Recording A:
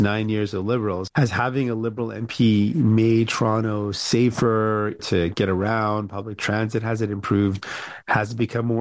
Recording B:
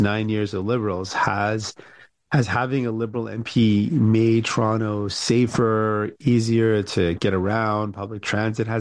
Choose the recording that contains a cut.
A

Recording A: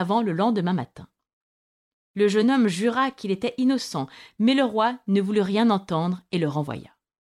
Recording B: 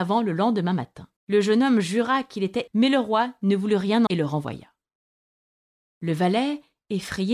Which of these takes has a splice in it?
B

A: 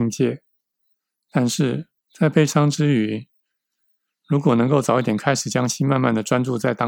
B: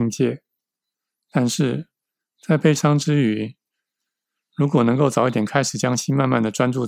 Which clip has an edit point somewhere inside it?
A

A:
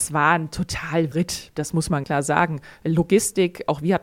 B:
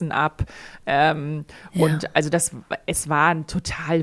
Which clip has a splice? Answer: A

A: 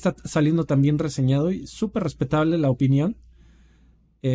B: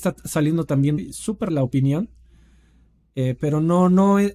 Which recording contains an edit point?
B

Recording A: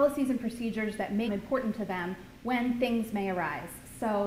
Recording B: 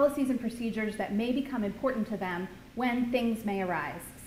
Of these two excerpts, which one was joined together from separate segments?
A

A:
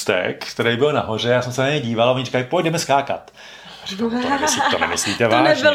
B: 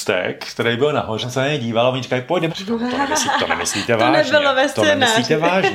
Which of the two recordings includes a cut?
B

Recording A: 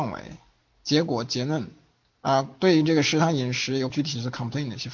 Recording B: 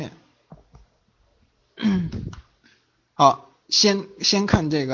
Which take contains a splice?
A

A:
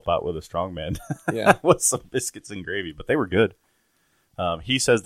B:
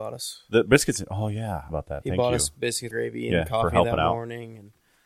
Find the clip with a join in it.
B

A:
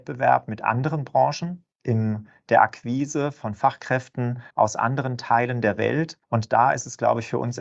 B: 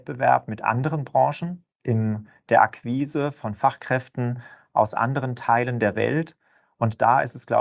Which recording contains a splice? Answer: A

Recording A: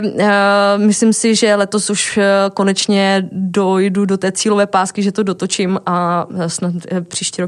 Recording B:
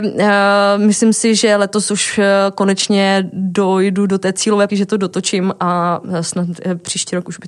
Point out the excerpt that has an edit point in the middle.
B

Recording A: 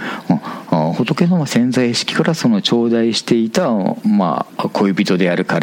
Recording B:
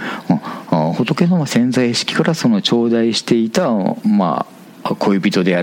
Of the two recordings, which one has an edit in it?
A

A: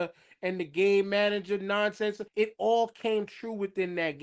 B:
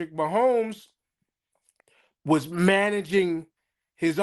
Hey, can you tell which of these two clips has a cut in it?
A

